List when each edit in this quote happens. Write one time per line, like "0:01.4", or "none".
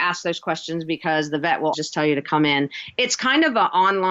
0:01.7